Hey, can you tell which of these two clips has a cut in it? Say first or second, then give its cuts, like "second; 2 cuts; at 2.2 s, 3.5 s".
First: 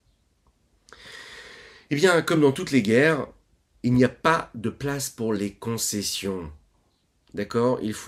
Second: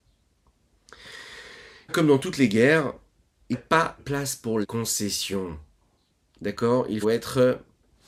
second; 5 cuts; at 1.9 s, 3.5 s, 4.0 s, 4.6 s, 7.0 s